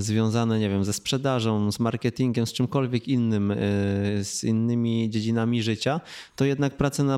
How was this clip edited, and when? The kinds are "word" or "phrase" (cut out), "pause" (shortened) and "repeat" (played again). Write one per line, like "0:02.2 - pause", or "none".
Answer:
none